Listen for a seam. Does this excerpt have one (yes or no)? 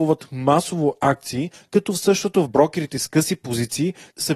yes